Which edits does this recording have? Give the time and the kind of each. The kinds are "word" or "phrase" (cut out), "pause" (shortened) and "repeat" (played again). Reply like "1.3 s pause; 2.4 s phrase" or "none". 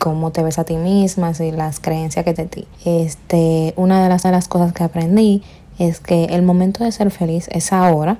2.4 s word; 2.7 s pause; 4.2 s repeat

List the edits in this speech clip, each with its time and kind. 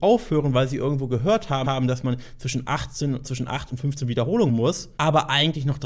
1.6 s repeat; 3.2 s word; 4.5 s word

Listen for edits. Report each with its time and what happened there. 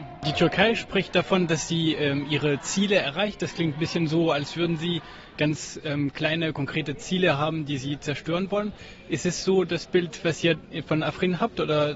none

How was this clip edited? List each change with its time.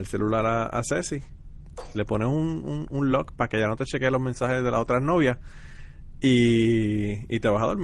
none

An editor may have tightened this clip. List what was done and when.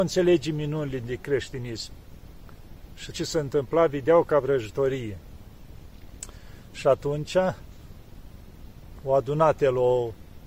3.1 s word

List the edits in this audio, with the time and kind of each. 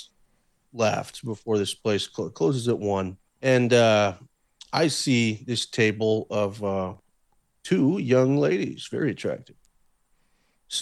3.3 s pause

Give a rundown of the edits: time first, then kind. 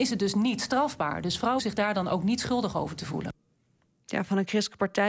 1.6 s word

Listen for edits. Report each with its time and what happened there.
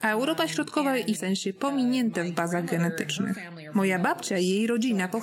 1.1 s phrase

